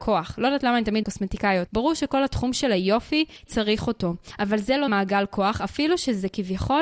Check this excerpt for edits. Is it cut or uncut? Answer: cut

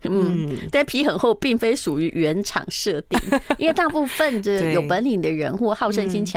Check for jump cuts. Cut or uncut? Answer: uncut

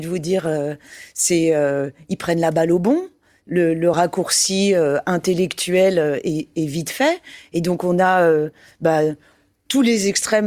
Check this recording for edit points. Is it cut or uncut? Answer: uncut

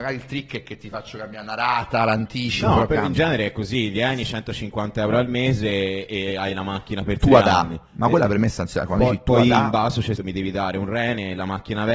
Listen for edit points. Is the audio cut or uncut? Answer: cut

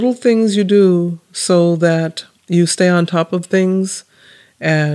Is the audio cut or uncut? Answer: uncut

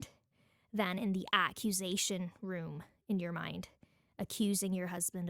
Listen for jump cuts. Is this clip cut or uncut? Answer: uncut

